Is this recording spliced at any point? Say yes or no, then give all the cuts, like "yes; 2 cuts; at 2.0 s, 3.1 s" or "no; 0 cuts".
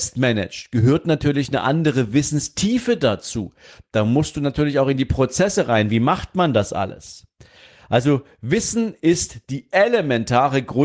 no; 0 cuts